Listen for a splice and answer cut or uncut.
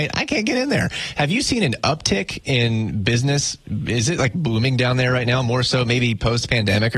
uncut